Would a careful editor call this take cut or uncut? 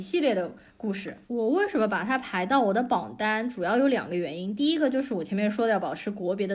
cut